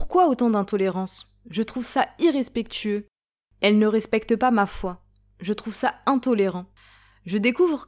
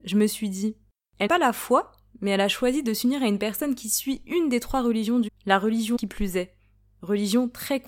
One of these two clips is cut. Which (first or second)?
second